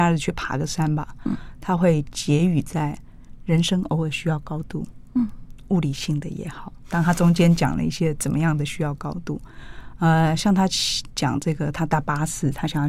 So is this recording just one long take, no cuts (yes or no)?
yes